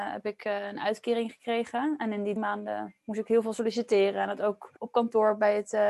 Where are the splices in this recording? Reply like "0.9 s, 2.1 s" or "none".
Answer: 2.4 s, 4.8 s